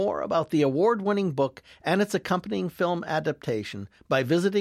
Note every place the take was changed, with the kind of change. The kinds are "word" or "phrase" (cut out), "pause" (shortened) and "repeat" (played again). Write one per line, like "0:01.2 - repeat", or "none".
none